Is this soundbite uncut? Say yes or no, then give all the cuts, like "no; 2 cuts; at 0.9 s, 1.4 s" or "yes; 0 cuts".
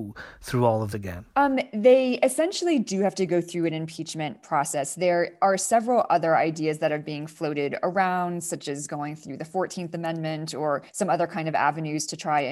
no; 2 cuts; at 0.9 s, 10.9 s